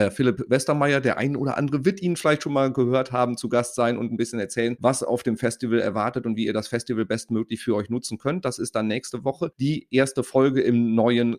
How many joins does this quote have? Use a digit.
0